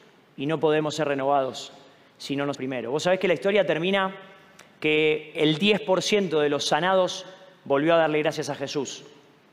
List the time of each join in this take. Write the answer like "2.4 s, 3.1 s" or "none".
2.5 s